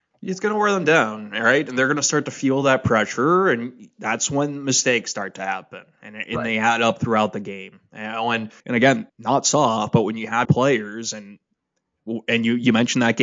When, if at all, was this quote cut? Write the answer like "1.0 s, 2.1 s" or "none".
8.6 s, 9.1 s, 10.4 s